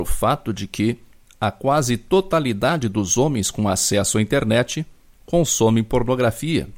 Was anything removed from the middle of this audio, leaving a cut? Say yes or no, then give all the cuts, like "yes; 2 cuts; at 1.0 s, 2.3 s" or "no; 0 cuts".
no; 0 cuts